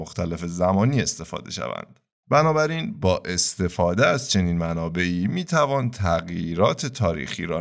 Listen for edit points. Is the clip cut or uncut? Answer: uncut